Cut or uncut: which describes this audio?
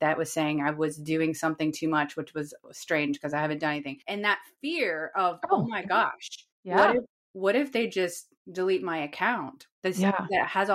cut